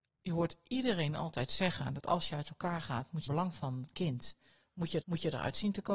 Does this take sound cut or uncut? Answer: cut